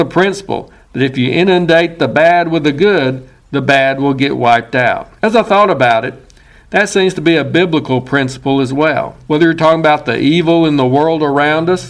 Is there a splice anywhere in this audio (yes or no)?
yes